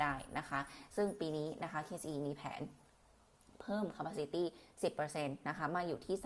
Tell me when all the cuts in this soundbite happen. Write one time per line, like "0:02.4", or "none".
none

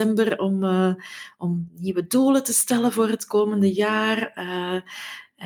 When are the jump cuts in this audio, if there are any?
none

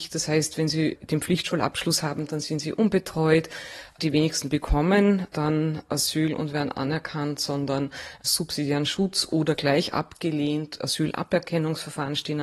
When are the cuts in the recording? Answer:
none

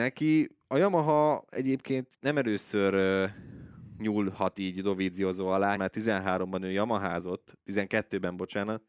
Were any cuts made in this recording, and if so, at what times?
0:02.1
0:05.8

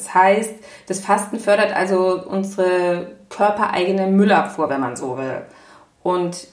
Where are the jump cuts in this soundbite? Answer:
none

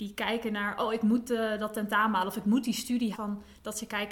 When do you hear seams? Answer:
0:03.1

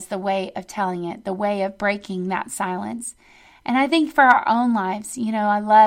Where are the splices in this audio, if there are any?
none

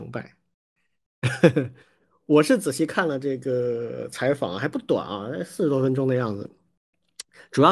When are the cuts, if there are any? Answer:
0:01.8

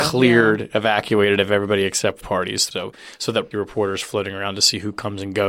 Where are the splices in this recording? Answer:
0:02.2
0:02.7
0:03.5

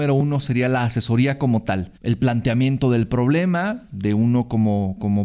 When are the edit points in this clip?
0:02.0

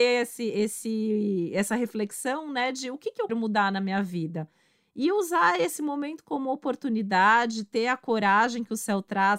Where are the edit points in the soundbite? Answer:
0:03.3

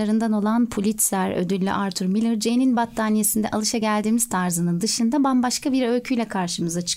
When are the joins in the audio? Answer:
none

